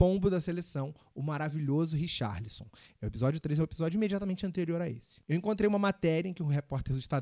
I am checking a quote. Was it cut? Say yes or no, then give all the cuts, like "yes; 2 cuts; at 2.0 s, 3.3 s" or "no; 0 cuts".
no; 0 cuts